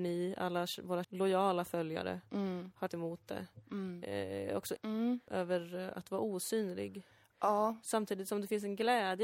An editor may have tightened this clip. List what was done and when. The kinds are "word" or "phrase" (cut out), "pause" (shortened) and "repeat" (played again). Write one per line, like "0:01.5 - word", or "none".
0:01.0 - word
0:02.9 - word
0:04.8 - word